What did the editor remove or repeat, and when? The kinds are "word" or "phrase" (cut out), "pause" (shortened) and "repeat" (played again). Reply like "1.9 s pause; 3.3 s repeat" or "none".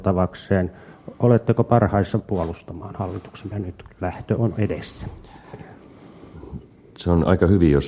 2.2 s word; 3.5 s word; 3.9 s word